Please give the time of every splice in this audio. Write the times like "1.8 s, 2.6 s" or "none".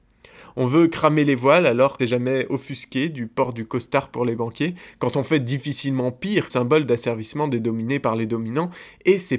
2.0 s, 6.5 s